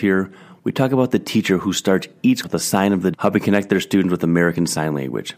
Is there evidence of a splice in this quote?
yes; 2 cuts; at 2.4 s, 3.1 s

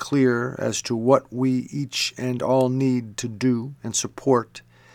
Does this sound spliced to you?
yes; 1 cut; at 3.8 s

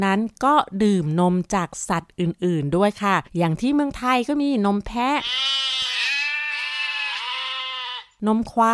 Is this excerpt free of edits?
no; 1 cut; at 3.3 s

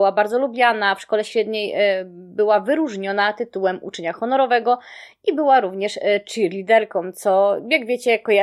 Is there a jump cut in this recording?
no; 0 cuts

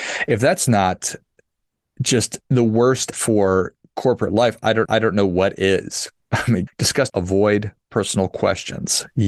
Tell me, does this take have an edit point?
yes; 6 cuts; at 2.5 s, 3.1 s, 4.9 s, 6.2 s, 6.7 s, 7.1 s

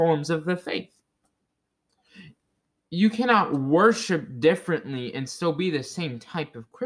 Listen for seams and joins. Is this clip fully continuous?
yes; 0 cuts

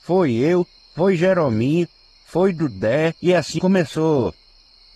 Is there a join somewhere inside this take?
yes; 2 cuts; at 3.2 s, 3.6 s

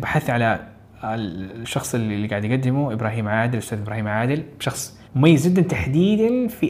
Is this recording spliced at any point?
yes; 1 cut; at 5.0 s

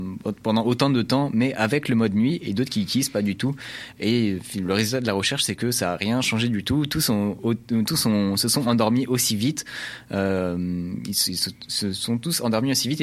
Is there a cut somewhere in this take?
no; 0 cuts

